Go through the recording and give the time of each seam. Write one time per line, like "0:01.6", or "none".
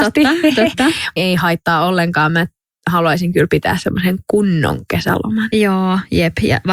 0:01.2